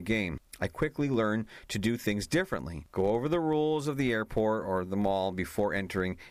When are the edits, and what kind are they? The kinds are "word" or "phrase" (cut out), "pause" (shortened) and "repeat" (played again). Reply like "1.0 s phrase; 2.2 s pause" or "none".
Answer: 2.9 s pause

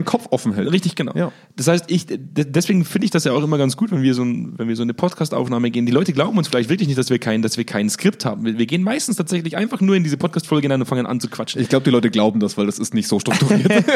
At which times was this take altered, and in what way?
none

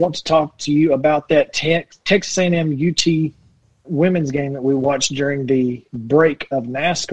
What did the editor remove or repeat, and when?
3.8 s word; 5.9 s pause

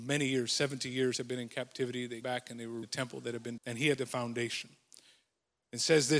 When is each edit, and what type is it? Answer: 2.2 s word; 2.8 s word; 3.6 s word; 4.0 s word

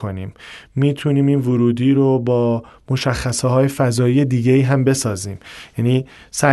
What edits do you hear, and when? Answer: none

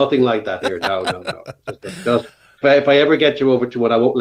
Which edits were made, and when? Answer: 2.6 s word

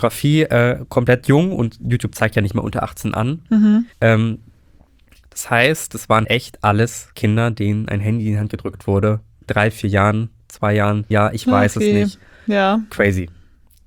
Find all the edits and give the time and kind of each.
3.9 s pause; 6.2 s word; 7.1 s pause; 11.1 s word

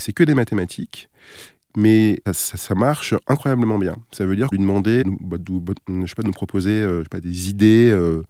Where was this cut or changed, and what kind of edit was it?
2.3 s word; 4.5 s phrase; 5.0 s word

